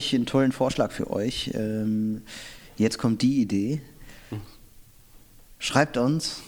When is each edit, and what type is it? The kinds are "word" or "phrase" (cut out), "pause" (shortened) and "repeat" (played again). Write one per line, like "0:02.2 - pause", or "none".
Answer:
none